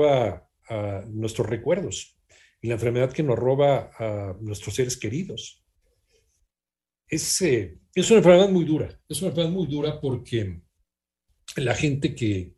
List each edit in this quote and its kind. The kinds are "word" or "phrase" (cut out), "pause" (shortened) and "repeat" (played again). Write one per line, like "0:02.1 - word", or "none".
none